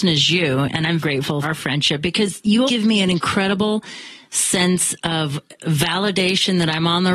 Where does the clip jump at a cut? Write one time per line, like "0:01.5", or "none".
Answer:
0:01.0
0:01.4
0:02.7
0:05.6